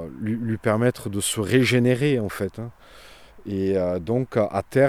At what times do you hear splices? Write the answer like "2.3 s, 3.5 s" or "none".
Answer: none